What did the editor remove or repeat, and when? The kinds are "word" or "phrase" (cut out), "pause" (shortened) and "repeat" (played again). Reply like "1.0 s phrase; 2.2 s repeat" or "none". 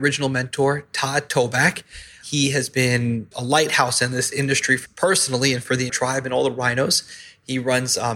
3.3 s word; 4.9 s word; 5.9 s word